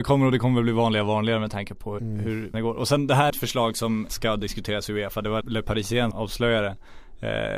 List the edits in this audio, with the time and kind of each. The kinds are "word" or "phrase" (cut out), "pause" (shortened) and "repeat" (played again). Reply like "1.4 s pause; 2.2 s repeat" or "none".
2.0 s word; 2.5 s word; 3.3 s phrase; 4.1 s word; 5.4 s word; 6.1 s word